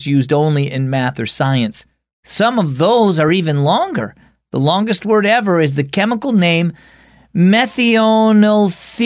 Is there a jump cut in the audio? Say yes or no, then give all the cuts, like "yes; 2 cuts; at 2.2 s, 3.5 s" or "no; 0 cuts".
no; 0 cuts